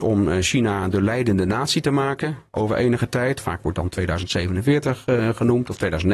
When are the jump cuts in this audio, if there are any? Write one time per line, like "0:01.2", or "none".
none